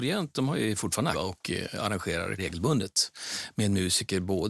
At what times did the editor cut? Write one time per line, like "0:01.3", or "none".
0:01.1
0:02.4